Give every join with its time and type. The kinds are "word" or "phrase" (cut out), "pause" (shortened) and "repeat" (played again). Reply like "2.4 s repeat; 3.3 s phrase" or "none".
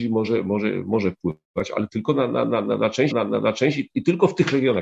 3.1 s repeat